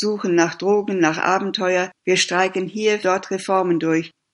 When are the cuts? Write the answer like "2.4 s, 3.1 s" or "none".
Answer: 2.0 s, 3.0 s